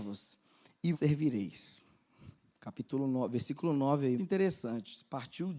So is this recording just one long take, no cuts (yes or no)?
no